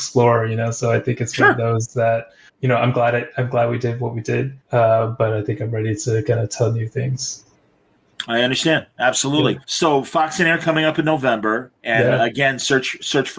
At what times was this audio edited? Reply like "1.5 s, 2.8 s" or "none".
2.5 s, 4.6 s, 9.6 s, 11.8 s